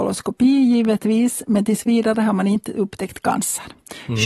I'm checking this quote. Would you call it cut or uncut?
uncut